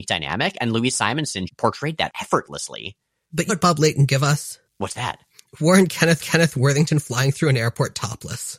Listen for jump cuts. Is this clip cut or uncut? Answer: cut